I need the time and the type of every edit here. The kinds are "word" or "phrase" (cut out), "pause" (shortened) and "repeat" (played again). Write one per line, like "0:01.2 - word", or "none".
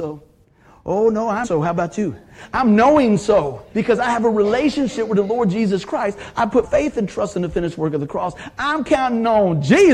0:01.4 - phrase
0:03.7 - pause
0:06.6 - word